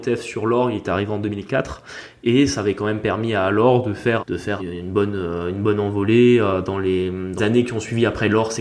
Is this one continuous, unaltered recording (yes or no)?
no